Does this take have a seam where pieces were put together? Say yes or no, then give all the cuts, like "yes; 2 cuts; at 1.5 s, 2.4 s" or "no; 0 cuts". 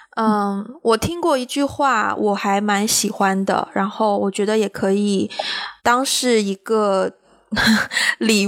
yes; 1 cut; at 5.8 s